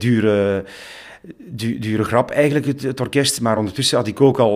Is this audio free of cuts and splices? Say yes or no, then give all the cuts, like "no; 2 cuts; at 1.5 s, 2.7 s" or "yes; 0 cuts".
yes; 0 cuts